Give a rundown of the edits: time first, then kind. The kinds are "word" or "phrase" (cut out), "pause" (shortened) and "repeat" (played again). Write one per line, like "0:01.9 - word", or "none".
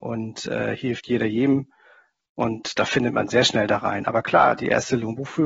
none